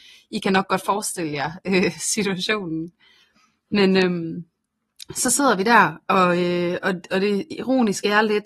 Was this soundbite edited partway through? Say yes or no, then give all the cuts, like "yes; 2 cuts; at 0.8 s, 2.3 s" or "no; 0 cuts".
no; 0 cuts